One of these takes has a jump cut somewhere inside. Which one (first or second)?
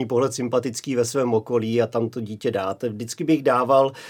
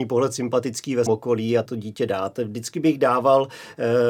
second